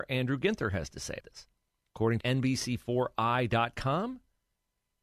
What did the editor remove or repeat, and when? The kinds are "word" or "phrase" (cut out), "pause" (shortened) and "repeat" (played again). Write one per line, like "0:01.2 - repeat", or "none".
0:01.2 - word
0:02.2 - word